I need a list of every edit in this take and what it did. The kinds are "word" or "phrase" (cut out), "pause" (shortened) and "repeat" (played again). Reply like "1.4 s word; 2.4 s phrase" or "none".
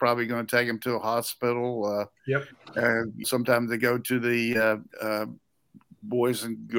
3.2 s word; 4.9 s pause